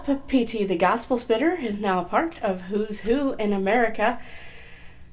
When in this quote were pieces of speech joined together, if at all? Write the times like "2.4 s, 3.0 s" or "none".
none